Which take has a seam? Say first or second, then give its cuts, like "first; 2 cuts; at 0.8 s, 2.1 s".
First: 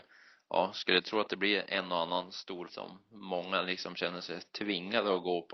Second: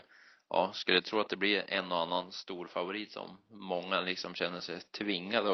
first; 1 cut; at 2.7 s